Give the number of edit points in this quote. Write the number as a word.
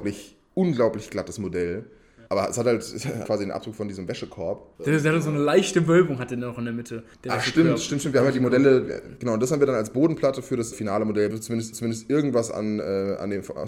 seven